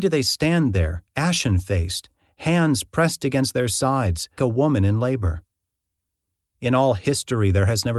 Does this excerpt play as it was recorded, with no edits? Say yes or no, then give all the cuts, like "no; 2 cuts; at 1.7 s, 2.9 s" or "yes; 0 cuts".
no; 1 cut; at 4.4 s